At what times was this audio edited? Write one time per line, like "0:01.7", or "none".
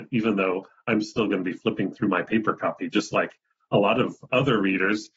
none